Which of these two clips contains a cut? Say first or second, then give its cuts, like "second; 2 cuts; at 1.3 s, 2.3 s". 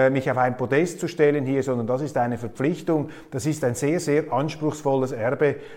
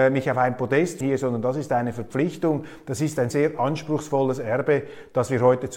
second; 2 cuts; at 1.0 s, 3.3 s